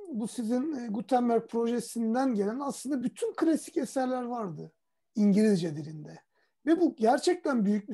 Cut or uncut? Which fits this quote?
uncut